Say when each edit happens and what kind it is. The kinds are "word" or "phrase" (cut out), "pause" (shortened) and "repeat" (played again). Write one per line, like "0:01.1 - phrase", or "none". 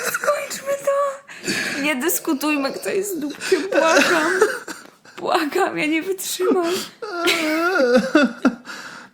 none